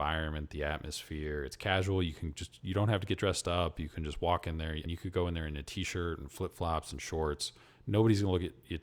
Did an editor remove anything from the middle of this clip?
yes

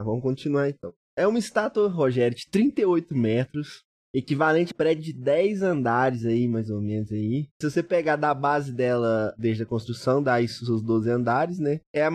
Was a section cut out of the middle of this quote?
yes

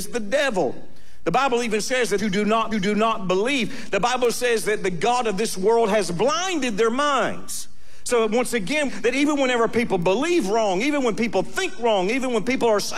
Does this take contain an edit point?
yes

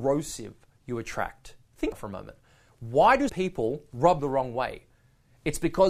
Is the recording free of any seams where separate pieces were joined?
no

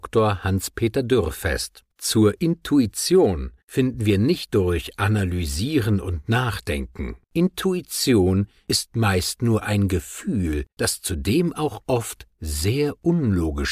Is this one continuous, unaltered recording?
no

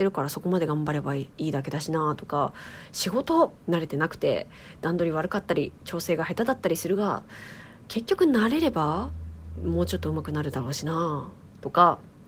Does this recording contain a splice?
yes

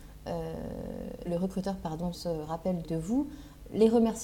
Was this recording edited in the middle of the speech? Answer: yes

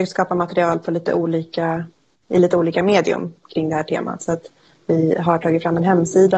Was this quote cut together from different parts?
no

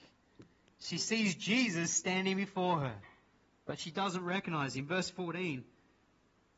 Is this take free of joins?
yes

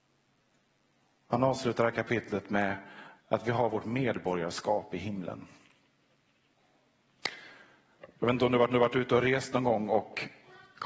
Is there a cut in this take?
yes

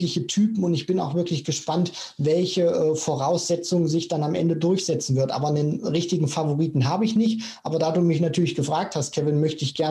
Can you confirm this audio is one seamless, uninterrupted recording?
yes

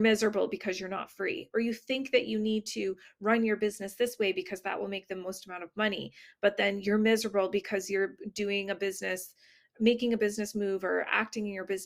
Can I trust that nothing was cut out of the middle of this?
yes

